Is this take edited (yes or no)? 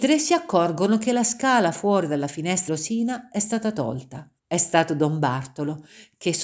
yes